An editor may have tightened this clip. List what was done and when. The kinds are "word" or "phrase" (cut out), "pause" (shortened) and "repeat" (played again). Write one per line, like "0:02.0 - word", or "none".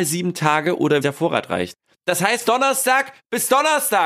0:01.0 - word
0:02.4 - word